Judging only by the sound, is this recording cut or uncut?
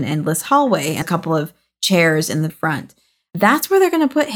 cut